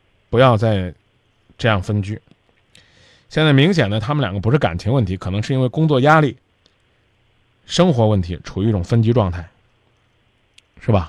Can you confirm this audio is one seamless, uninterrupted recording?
yes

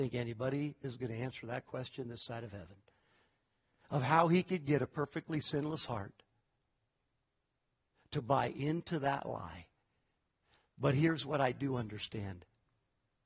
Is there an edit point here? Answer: no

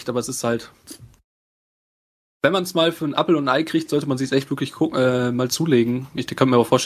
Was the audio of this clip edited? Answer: no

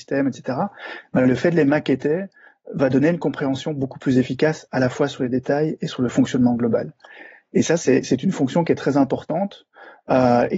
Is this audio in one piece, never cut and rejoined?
yes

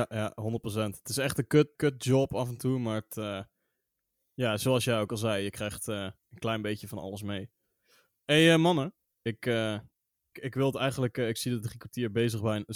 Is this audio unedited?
no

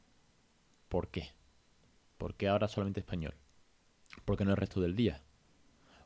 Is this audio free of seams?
yes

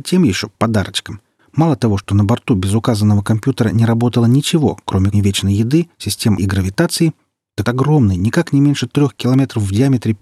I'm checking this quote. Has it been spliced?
yes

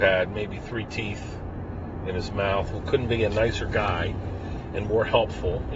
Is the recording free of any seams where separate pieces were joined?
yes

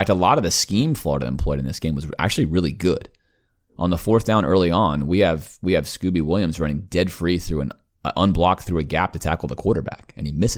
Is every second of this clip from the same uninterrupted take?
yes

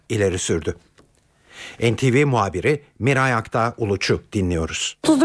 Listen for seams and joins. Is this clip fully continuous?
yes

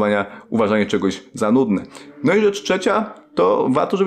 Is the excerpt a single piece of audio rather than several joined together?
yes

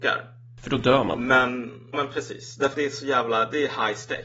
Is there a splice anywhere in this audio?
yes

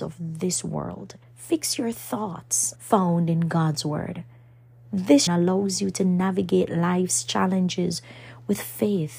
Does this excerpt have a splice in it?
yes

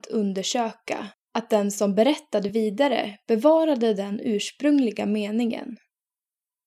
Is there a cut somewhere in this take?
no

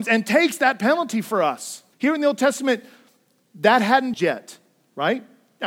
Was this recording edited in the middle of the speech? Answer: yes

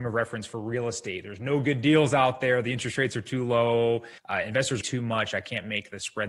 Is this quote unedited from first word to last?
no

